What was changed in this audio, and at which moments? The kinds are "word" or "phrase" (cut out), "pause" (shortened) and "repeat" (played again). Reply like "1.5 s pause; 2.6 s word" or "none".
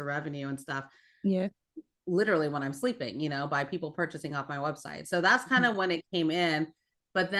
none